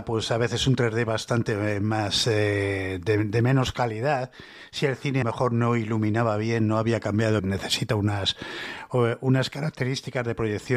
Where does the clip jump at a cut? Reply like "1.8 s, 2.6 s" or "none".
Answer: 5.2 s, 7.4 s